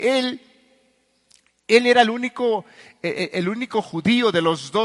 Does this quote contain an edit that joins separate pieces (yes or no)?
no